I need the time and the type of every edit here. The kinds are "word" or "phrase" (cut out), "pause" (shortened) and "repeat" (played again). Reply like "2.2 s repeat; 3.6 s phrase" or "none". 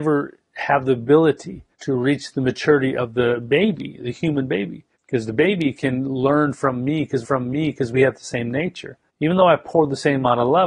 1.7 s pause; 4.9 s pause; 7.2 s repeat; 9.1 s pause